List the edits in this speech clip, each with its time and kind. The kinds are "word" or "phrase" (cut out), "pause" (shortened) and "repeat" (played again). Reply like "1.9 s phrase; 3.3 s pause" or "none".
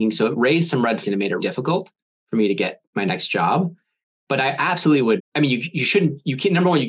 1.0 s word; 1.4 s word; 2.8 s pause; 5.2 s word